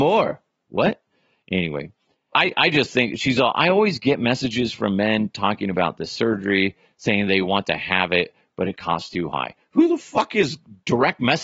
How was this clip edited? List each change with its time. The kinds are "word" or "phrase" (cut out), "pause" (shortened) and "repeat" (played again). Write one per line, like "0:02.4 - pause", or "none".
0:02.3 - word